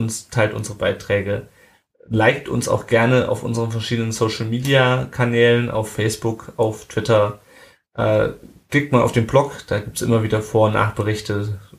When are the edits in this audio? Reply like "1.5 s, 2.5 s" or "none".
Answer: none

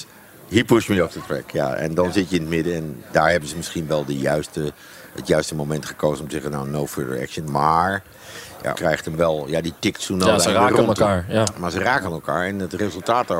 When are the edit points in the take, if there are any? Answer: 8.7 s

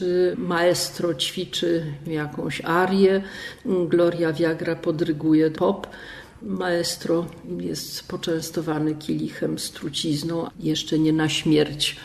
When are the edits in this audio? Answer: 5.6 s, 10.5 s

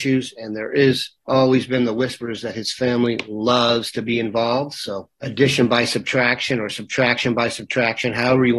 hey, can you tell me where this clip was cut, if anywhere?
1.2 s, 5.1 s

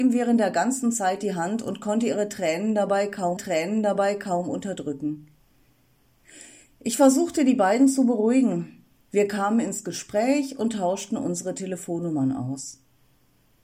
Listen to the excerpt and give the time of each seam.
3.4 s

